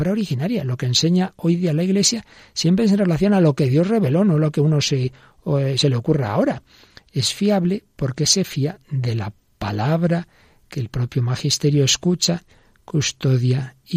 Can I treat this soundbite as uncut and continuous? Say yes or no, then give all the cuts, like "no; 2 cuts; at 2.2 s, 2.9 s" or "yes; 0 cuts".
yes; 0 cuts